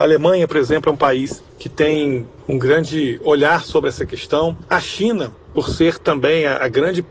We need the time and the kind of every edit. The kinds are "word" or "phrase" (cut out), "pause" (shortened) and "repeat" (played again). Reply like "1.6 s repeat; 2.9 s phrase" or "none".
none